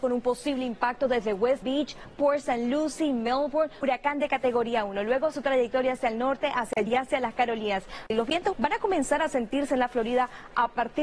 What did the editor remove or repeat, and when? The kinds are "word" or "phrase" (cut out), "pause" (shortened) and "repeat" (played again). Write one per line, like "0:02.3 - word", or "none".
0:01.6 - word
0:03.8 - word
0:05.3 - word
0:06.9 - word
0:08.5 - word